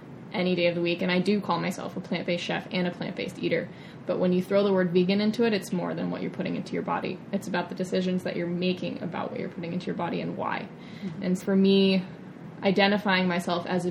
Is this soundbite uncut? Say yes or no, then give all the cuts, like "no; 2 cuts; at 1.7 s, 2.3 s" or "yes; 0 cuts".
no; 2 cuts; at 5.7 s, 11.4 s